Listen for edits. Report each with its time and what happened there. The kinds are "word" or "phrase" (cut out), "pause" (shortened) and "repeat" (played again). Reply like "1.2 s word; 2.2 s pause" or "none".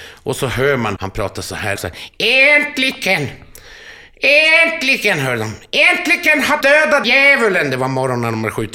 1.0 s word; 1.8 s word; 6.6 s word; 7.0 s word